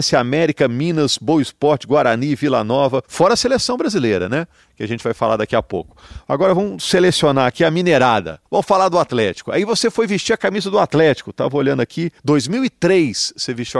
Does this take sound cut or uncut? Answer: cut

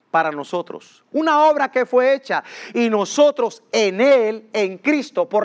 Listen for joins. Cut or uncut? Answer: uncut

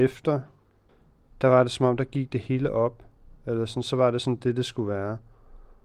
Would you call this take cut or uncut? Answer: uncut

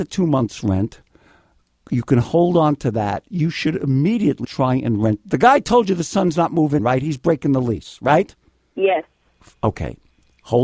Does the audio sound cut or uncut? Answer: cut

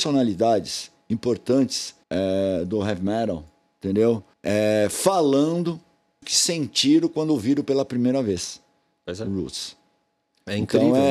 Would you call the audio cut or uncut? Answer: cut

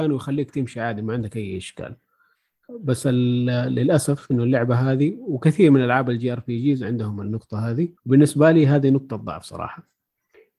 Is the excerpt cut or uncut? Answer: cut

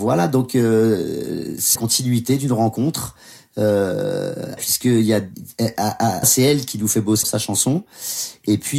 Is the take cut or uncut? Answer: cut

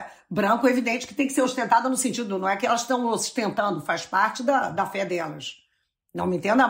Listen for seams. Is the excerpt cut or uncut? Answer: uncut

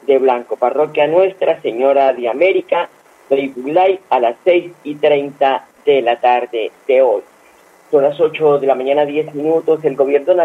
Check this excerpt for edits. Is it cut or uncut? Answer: uncut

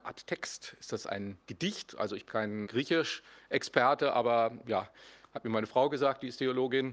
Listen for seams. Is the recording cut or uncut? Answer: cut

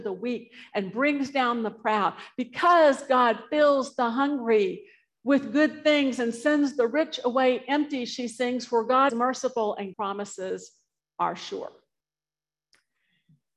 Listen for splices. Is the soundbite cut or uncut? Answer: cut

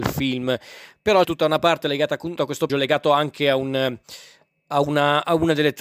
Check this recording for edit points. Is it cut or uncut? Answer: cut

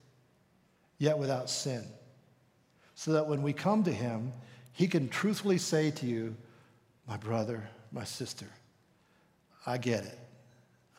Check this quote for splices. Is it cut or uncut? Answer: uncut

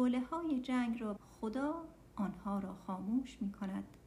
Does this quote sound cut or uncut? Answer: cut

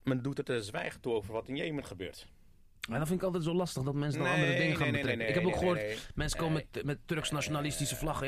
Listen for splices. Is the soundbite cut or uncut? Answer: uncut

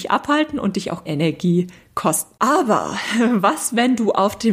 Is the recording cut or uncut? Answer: cut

